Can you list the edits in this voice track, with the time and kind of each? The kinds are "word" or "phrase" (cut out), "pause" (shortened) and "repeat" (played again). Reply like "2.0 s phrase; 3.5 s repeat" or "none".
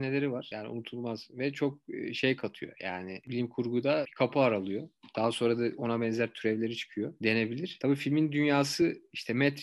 4.0 s word